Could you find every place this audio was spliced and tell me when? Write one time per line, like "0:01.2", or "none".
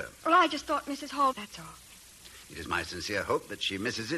0:01.3